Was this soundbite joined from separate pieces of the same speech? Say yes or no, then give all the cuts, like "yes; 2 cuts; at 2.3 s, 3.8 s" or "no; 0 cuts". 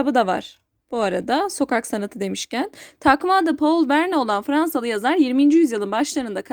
no; 0 cuts